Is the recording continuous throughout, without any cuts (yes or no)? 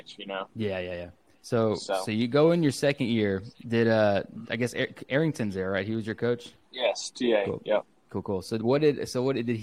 no